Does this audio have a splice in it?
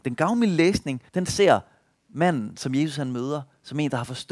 yes; 1 cut; at 1.1 s

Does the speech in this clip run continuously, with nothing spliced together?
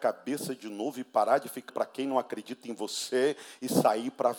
no; 1 cut; at 1.7 s

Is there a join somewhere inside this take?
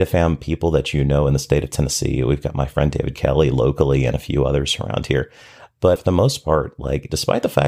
yes; 1 cut; at 6.0 s

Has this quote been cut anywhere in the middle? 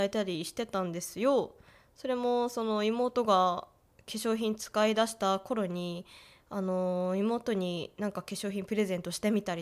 no; 0 cuts

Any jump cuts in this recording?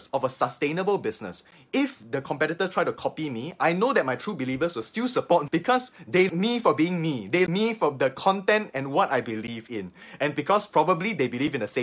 yes; 3 cuts; at 5.5 s, 6.3 s, 7.5 s

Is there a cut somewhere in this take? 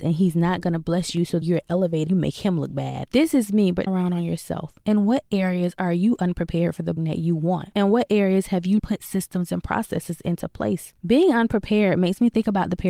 yes; 5 cuts; at 1.4 s, 2.1 s, 3.9 s, 7.0 s, 8.8 s

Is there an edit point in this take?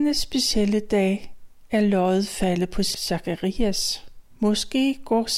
yes; 1 cut; at 4.3 s

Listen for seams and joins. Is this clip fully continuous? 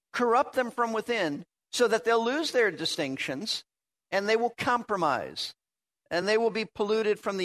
yes; 0 cuts

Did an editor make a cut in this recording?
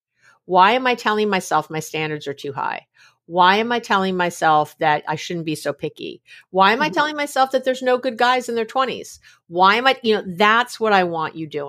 no; 0 cuts

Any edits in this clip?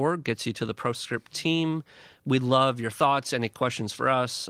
no; 0 cuts

